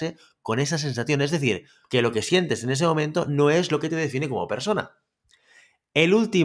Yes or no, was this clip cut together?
yes